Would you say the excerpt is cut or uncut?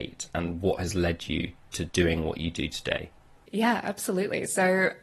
uncut